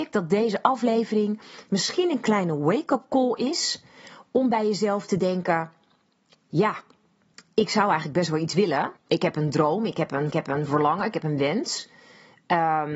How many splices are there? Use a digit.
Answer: 3